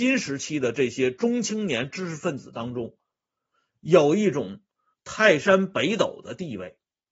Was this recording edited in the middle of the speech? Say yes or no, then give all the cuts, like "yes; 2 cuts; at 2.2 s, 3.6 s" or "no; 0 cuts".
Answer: no; 0 cuts